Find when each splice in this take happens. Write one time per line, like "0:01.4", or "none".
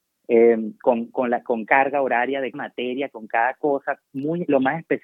0:01.7
0:02.5